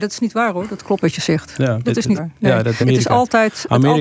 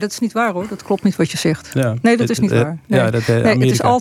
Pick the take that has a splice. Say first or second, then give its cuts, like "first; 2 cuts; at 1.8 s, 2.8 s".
first; 4 cuts; at 1.0 s, 1.8 s, 2.2 s, 2.8 s